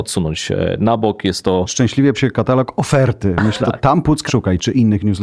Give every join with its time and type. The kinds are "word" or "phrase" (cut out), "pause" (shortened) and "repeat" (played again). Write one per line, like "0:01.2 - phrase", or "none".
0:02.1 - word
0:03.6 - word
0:04.3 - word